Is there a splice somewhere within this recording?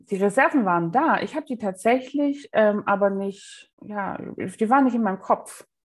yes; 1 cut; at 3.7 s

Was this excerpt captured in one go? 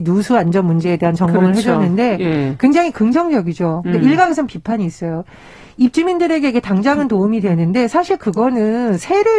yes; 0 cuts

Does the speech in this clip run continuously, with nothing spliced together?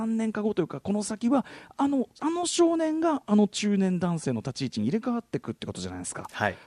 no; 1 cut; at 2.2 s

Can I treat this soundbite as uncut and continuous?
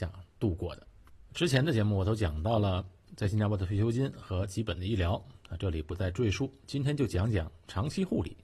no; 1 cut; at 1.3 s

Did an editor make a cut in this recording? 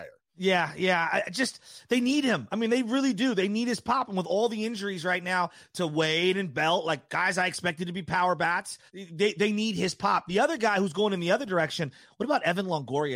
yes; 1 cut; at 8.9 s

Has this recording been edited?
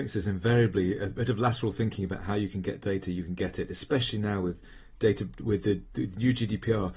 no; 0 cuts

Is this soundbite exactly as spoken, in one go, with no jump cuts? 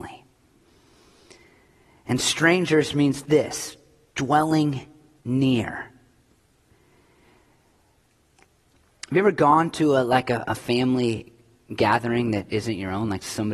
yes; 0 cuts

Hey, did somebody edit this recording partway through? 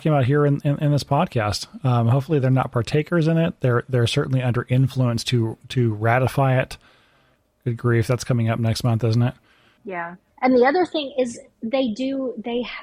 no; 0 cuts

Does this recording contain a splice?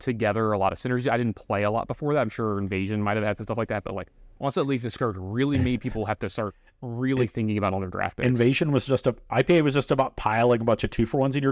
no; 0 cuts

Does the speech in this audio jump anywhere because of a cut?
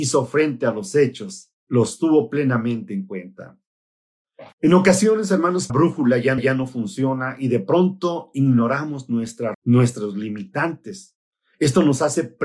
yes; 5 cuts; at 1.6 s, 4.5 s, 5.7 s, 6.4 s, 9.5 s

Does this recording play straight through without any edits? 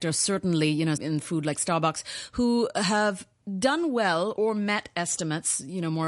no; 2 cuts; at 1.0 s, 4.4 s

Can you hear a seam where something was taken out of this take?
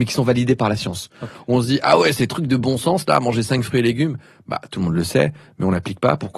no; 0 cuts

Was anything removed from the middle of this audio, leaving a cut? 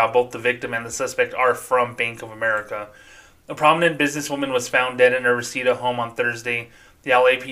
no; 0 cuts

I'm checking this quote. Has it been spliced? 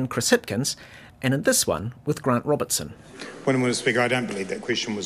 no; 0 cuts

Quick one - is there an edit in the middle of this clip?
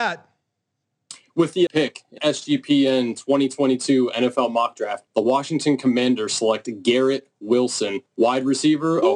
yes; 4 cuts; at 1.7 s, 2.2 s, 5.1 s, 8.1 s

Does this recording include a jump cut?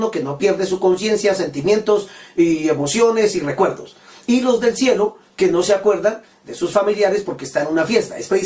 no; 0 cuts

